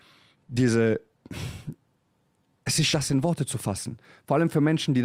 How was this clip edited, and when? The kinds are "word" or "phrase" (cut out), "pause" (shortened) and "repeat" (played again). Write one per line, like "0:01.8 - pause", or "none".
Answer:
0:02.9 - word